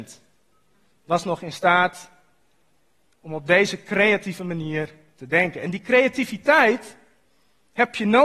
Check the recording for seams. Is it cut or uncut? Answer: uncut